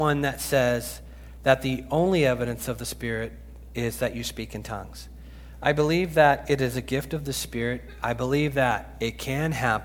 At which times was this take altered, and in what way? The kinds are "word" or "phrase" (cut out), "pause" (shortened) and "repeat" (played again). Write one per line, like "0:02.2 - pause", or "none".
none

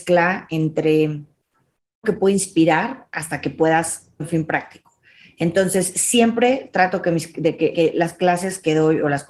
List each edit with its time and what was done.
0:02.0 - word
0:04.2 - word
0:07.7 - word

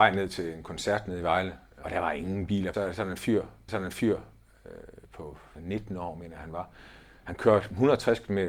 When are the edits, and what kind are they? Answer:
0:01.8 - phrase
0:02.7 - phrase
0:03.7 - repeat
0:05.6 - phrase

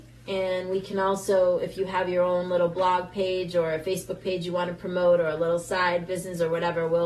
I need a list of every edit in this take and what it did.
none

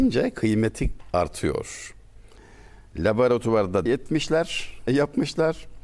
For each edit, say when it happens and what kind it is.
0:03.9 - word
0:04.9 - word

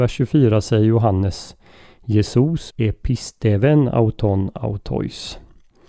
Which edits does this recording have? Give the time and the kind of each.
0:02.7 - word

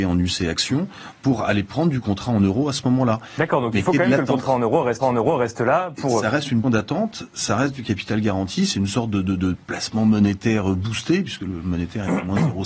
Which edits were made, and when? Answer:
0:05.0 - repeat
0:06.6 - word

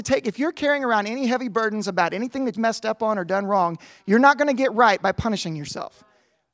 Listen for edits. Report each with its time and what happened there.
0:02.6 - word

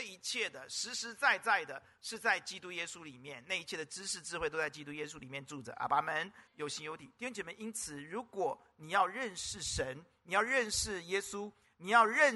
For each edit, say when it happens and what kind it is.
0:06.5 - pause

